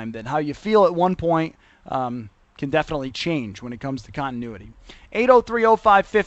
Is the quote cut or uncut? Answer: uncut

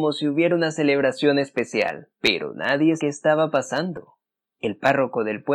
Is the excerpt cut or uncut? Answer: cut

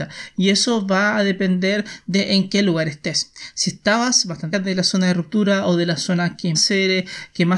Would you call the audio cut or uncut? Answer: cut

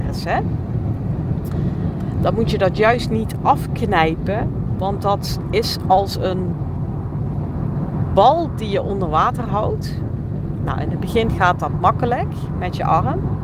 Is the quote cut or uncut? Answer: uncut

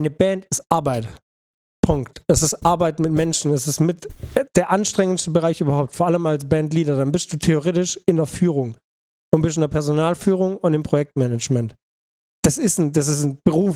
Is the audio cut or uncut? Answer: uncut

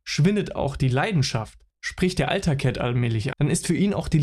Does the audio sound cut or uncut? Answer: cut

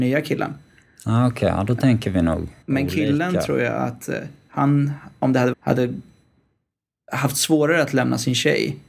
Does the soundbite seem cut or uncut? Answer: cut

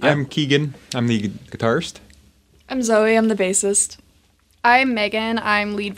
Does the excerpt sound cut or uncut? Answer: cut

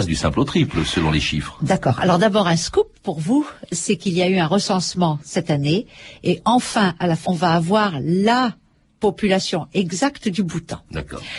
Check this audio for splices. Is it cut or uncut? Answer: cut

